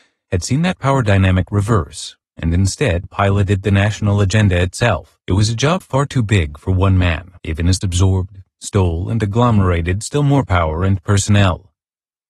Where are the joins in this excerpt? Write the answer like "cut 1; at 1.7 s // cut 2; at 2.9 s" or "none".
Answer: cut 1; at 3.0 s // cut 2; at 5.2 s // cut 3; at 5.8 s // cut 4; at 7.4 s // cut 5; at 7.8 s

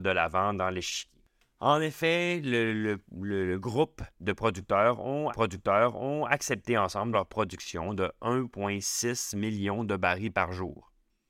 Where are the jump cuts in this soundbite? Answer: cut 1; at 5.3 s // cut 2; at 7.1 s

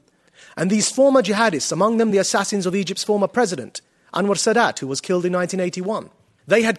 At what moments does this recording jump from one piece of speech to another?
none

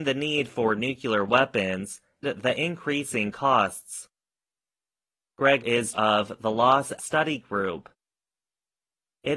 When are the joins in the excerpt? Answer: cut 1; at 2.2 s // cut 2; at 5.6 s // cut 3; at 5.9 s // cut 4; at 7.0 s

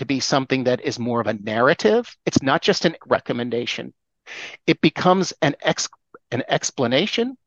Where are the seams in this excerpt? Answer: cut 1; at 2.2 s // cut 2; at 3.0 s

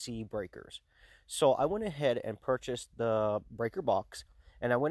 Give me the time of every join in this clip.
none

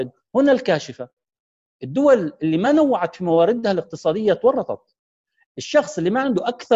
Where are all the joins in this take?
none

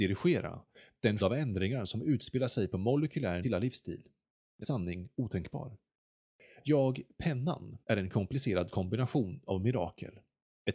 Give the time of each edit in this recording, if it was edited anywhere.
cut 1; at 1.2 s // cut 2; at 3.4 s // cut 3; at 4.6 s // cut 4; at 7.8 s

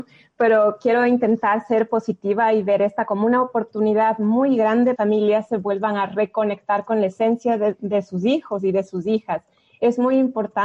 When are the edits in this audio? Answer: cut 1; at 5.0 s

